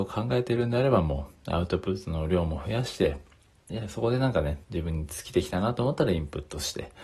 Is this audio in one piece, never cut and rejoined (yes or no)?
no